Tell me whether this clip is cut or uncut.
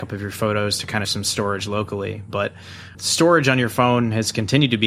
cut